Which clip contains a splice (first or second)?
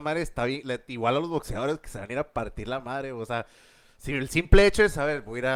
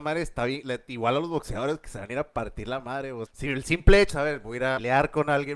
second